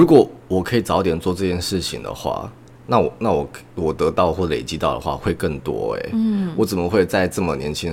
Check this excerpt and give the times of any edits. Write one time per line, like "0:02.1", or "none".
none

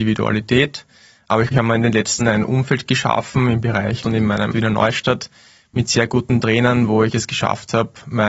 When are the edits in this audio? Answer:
0:01.5
0:02.2
0:04.0
0:04.5

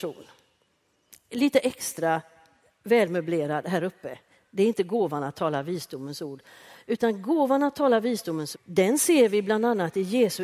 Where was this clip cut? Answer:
0:08.5

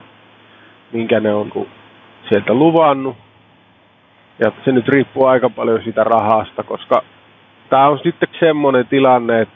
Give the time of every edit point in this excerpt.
0:01.5
0:04.5
0:08.3

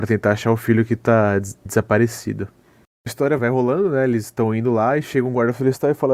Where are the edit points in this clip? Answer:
0:01.7
0:03.1
0:03.4

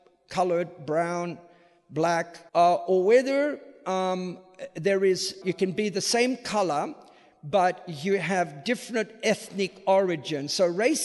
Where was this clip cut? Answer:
0:02.5
0:05.4

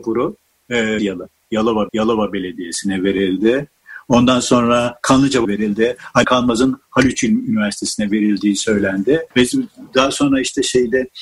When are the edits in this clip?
0:01.0
0:01.9
0:05.4
0:06.2
0:09.3

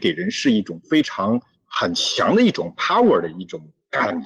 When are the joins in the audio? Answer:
none

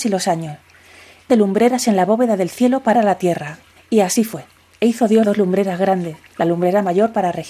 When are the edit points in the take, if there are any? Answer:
0:01.3
0:02.9
0:03.8
0:04.6
0:05.2
0:06.3

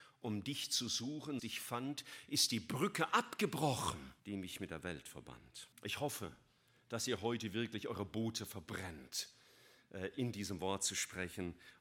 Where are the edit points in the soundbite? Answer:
0:01.4
0:04.2
0:05.7

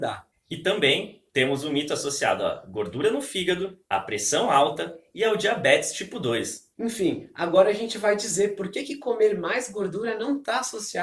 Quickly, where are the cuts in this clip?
0:03.8

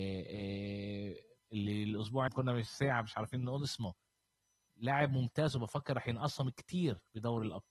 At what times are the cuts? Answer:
0:01.4
0:02.3

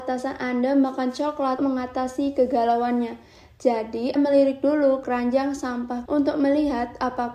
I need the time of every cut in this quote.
0:01.6
0:04.2
0:05.0
0:06.1

